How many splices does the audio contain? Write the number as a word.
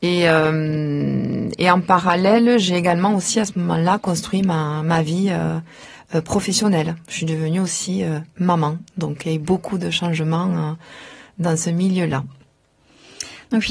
zero